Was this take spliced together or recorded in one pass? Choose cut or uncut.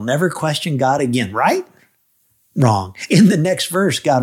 uncut